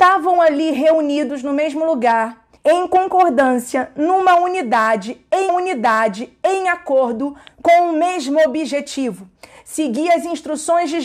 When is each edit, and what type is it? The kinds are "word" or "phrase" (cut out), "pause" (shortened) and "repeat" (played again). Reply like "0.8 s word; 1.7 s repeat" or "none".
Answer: 2.6 s pause; 5.5 s repeat